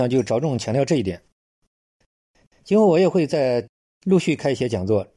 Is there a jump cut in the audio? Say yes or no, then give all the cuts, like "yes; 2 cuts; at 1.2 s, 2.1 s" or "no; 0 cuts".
no; 0 cuts